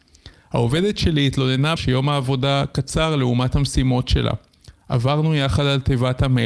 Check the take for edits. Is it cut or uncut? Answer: cut